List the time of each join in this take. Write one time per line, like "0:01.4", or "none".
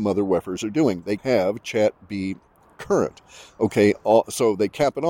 0:01.2
0:02.8